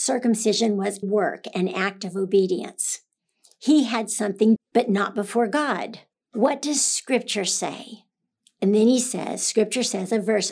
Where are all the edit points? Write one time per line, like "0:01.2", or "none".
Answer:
0:01.0
0:04.6
0:06.1